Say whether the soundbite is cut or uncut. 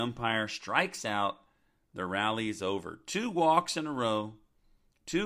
uncut